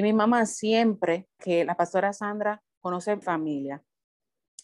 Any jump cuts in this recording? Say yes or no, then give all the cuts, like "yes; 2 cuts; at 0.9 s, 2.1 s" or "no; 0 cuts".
yes; 2 cuts; at 1.4 s, 3.2 s